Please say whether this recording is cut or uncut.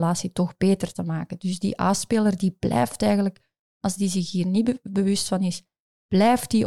uncut